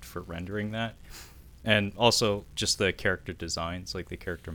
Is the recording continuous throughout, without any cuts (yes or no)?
yes